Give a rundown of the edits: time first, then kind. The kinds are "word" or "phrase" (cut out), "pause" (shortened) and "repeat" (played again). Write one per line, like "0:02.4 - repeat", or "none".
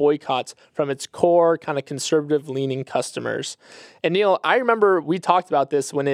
none